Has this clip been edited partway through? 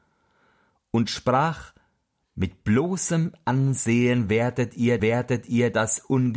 yes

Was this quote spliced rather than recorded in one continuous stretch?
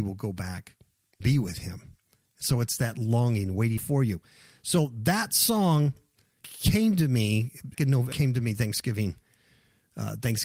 yes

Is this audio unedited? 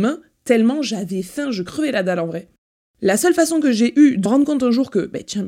no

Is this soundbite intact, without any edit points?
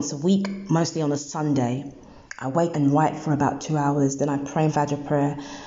no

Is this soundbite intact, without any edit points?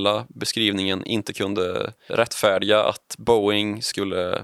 no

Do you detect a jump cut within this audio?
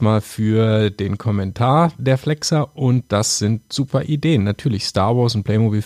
no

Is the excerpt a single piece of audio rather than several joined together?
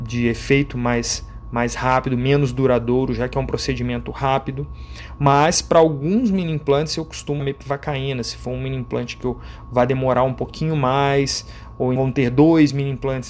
no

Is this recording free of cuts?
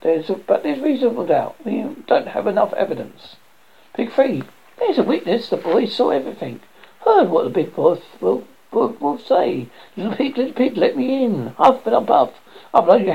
yes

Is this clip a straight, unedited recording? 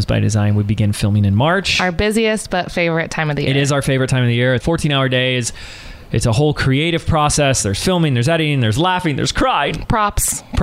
no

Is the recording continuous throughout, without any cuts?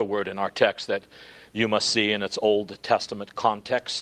yes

